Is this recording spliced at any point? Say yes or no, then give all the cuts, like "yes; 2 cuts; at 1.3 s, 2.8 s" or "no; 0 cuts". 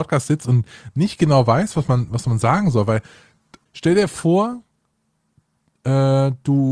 no; 0 cuts